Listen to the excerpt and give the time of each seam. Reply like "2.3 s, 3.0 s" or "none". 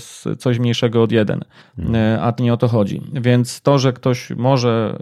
1.6 s, 2.4 s